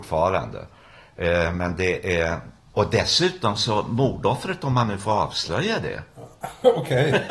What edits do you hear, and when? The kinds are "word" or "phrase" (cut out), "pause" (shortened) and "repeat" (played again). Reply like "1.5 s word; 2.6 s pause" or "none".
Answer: 2.6 s pause